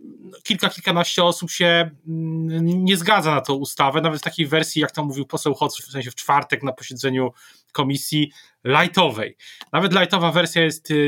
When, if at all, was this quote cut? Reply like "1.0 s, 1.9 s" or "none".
5.8 s